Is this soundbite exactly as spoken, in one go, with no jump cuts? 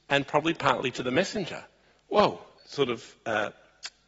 no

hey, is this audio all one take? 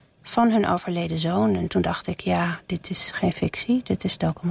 yes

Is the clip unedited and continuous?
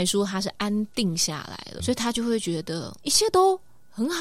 no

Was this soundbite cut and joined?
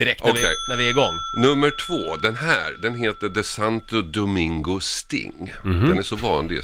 no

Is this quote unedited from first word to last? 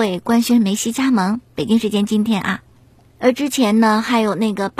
yes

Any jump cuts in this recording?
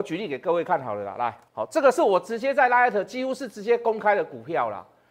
yes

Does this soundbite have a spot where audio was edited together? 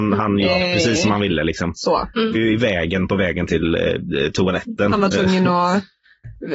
yes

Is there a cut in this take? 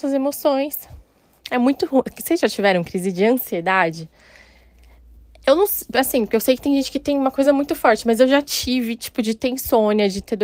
no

